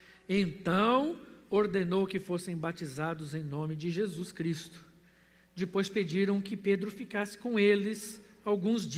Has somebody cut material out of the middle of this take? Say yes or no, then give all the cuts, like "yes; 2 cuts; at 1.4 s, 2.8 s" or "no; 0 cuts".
no; 0 cuts